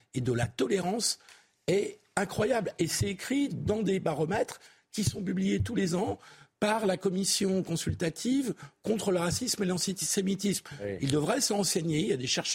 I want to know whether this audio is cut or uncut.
uncut